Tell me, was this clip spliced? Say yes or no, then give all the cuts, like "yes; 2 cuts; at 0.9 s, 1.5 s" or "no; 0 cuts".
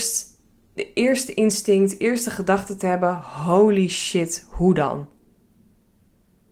no; 0 cuts